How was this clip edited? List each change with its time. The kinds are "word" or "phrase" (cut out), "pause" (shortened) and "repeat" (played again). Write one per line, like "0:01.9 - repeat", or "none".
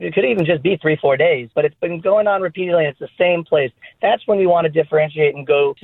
0:01.5 - pause